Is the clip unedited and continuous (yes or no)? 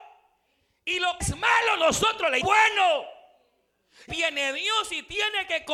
no